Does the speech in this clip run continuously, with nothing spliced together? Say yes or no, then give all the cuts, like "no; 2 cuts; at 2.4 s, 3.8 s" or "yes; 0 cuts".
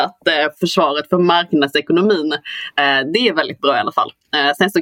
yes; 0 cuts